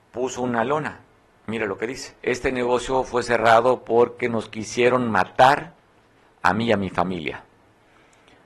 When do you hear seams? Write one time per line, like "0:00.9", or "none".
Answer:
0:02.2

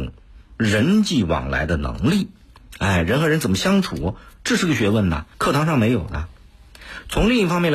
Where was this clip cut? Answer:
0:05.3

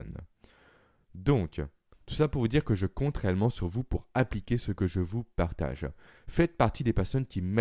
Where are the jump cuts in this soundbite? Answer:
none

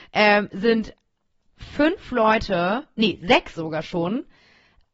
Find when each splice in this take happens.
none

